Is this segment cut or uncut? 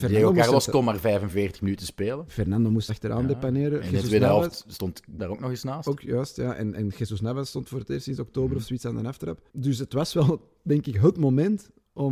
cut